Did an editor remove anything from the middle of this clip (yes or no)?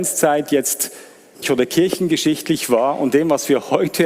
yes